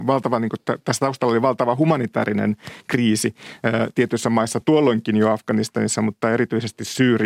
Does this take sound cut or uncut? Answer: uncut